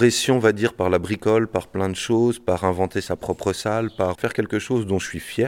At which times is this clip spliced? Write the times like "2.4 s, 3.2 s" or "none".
4.1 s